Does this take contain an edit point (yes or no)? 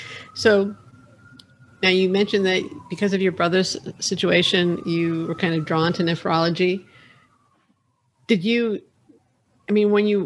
no